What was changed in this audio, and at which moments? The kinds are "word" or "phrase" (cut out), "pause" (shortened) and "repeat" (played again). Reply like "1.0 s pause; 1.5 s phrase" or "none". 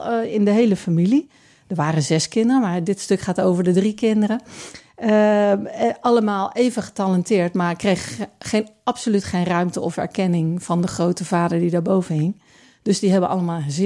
none

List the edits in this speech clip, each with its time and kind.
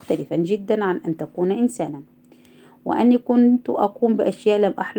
none

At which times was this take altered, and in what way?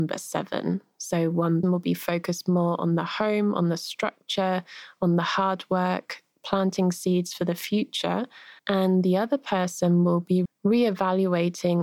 1.6 s word; 8.6 s pause; 10.5 s word

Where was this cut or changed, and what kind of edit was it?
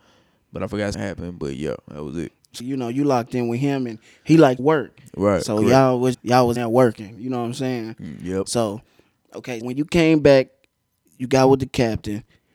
0.9 s word; 2.6 s word; 4.6 s word; 6.1 s word; 6.6 s word; 9.6 s word

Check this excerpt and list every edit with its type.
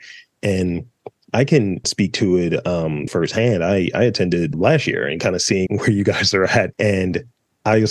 1.8 s word; 3.1 s phrase; 4.5 s word; 5.7 s word; 6.7 s word

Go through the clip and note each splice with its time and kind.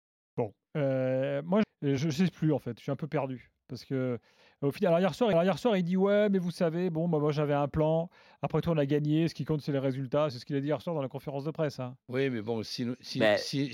1.6 s word; 2.0 s word; 5.3 s repeat; 12.0 s pause

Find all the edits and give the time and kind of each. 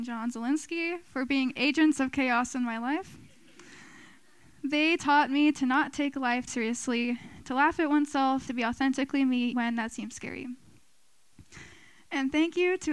6.5 s word; 8.5 s word; 9.5 s word

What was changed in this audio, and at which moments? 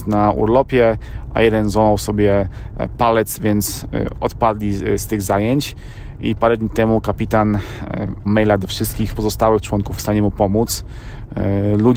8.3 s word; 10.0 s phrase

